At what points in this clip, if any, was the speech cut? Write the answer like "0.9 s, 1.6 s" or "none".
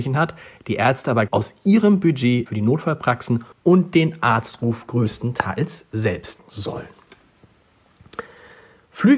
1.3 s, 2.5 s, 3.5 s, 6.4 s